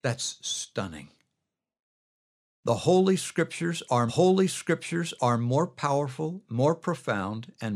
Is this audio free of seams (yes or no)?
no